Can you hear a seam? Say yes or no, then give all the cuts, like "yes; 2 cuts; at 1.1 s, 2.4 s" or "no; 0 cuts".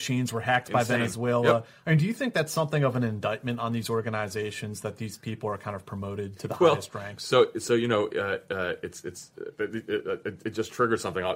no; 0 cuts